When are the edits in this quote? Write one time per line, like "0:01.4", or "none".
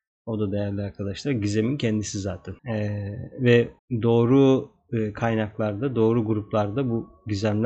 0:02.6
0:03.8